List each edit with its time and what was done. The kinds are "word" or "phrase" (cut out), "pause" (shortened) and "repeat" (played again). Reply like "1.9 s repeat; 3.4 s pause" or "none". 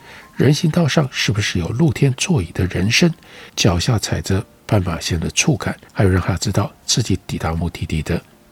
3.5 s pause; 5.9 s pause